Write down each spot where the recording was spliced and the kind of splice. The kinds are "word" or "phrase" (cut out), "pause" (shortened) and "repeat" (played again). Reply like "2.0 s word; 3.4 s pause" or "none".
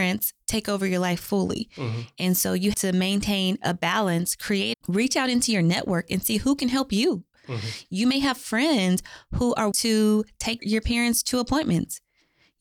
2.7 s word; 4.7 s phrase; 9.7 s word; 10.6 s word